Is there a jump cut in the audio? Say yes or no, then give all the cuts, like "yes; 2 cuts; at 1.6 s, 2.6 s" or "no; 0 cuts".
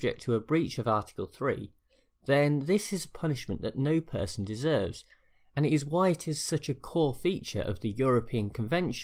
no; 0 cuts